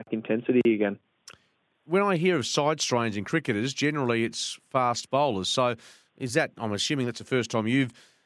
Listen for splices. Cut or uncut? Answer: uncut